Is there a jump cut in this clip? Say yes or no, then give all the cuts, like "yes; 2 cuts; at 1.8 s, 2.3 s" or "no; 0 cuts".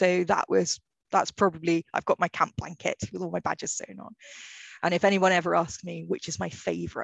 no; 0 cuts